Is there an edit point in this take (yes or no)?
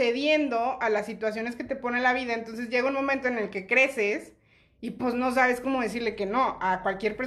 no